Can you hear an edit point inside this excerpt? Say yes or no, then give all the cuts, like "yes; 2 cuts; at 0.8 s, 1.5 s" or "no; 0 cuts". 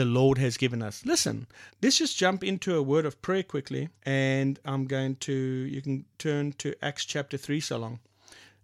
yes; 2 cuts; at 1.7 s, 4.0 s